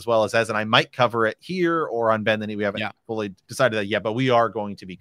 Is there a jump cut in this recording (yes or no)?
yes